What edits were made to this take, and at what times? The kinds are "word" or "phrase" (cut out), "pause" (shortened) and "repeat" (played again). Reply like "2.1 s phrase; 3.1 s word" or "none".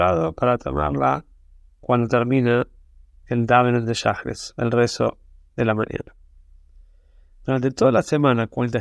none